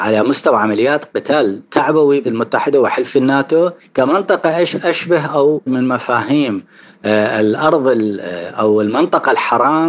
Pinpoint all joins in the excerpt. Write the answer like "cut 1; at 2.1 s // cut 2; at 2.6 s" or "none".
cut 1; at 2.2 s // cut 2; at 5.7 s